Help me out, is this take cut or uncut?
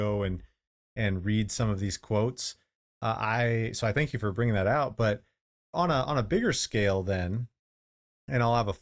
uncut